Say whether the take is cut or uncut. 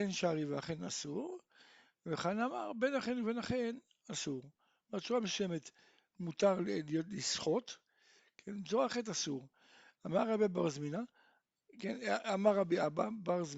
uncut